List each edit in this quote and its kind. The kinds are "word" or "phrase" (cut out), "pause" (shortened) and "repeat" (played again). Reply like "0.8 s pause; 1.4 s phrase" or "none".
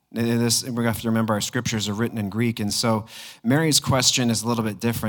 none